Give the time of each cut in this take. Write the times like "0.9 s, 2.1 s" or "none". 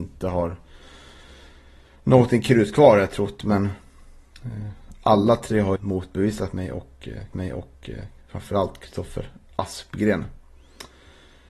5.8 s, 7.3 s